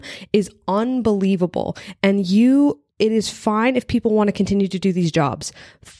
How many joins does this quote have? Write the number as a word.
one